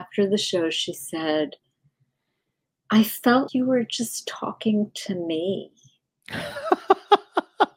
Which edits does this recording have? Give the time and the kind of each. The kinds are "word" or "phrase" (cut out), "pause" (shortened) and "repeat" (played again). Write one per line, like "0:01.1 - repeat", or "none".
0:03.5 - word